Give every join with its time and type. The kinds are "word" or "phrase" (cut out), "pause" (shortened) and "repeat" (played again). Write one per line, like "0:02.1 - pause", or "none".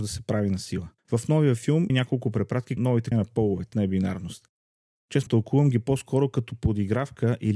0:01.0 - pause
0:01.9 - word
0:02.8 - word
0:03.1 - phrase
0:03.7 - word
0:05.3 - word